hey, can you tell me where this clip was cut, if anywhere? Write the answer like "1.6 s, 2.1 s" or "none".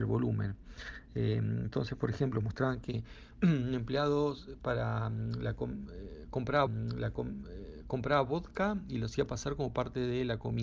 6.7 s

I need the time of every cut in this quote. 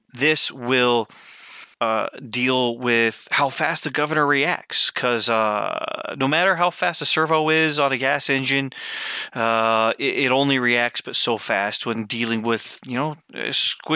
1.7 s

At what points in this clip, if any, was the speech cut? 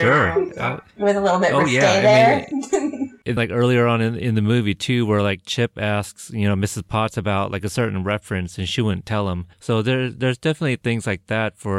3.4 s, 9.5 s

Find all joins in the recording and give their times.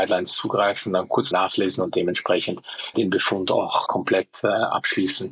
1.3 s, 2.9 s, 3.9 s

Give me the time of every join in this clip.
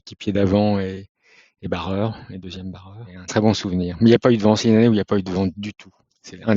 3.3 s

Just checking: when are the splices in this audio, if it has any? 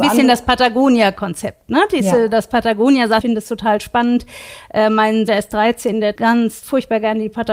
3.2 s, 5.3 s, 6.2 s

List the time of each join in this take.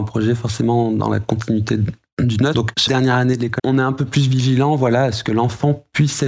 2.9 s, 3.6 s

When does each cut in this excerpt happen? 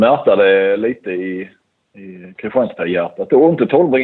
none

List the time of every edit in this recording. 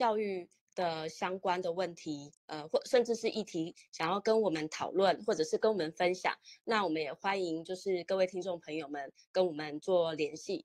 2.4 s

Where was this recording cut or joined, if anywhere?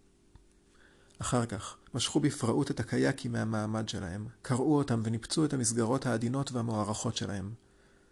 1.9 s

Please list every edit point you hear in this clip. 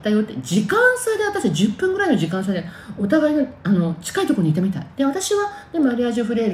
4.9 s

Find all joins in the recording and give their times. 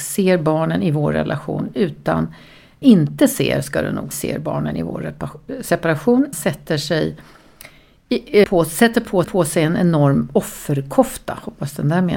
2.8 s, 4.1 s, 6.3 s, 8.4 s, 9.2 s

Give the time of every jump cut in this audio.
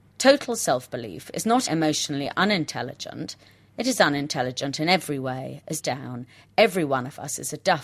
1.7 s, 5.8 s

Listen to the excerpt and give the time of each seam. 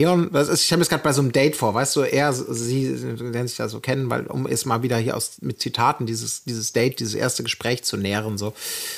none

